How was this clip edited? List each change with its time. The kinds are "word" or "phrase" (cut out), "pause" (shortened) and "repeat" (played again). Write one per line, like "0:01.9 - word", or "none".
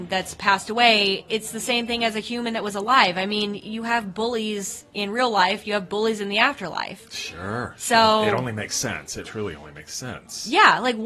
0:09.2 - word